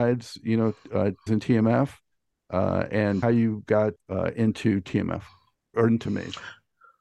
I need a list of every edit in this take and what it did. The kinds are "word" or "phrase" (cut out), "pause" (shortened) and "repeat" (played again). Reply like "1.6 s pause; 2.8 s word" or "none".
1.3 s word; 3.2 s word; 4.0 s word; 5.7 s word